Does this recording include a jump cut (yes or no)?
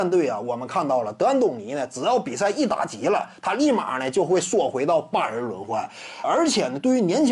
yes